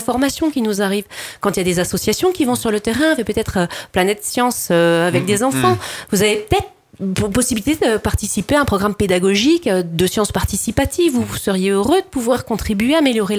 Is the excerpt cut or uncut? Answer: uncut